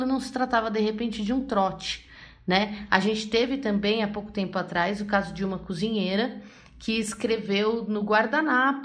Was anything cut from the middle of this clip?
no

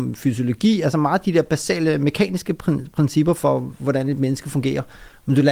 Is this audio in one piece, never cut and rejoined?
yes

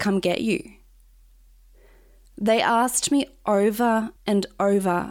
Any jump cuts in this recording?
yes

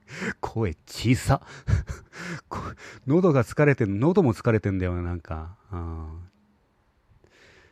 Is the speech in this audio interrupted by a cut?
yes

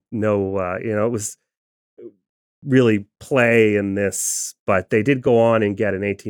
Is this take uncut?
yes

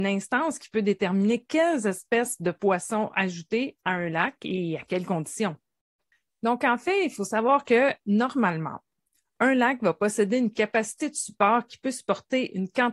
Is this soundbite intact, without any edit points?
no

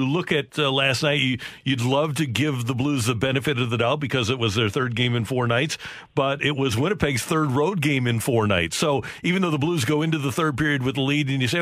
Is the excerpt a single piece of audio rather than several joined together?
yes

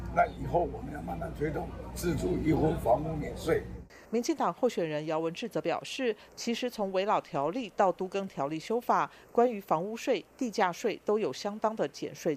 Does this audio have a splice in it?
yes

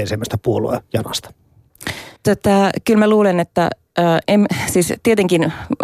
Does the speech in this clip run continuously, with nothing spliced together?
no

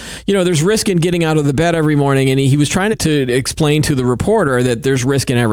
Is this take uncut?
no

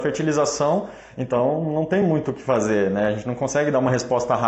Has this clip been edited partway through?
no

